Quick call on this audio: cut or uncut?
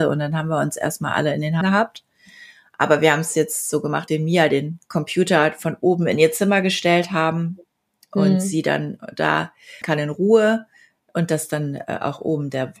cut